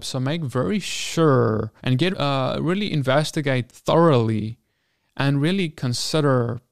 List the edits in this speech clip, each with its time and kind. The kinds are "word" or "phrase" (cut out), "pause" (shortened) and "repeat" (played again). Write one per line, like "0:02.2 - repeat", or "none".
0:01.8 - pause
0:02.1 - word
0:03.7 - word